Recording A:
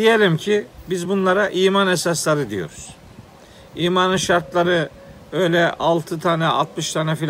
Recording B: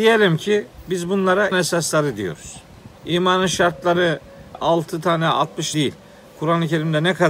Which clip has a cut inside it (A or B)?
B